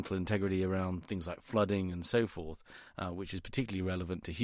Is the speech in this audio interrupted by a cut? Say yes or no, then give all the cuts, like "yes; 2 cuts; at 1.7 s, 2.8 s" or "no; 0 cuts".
no; 0 cuts